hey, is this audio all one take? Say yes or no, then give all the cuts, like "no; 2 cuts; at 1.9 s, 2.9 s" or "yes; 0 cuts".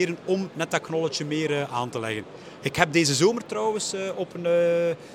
yes; 0 cuts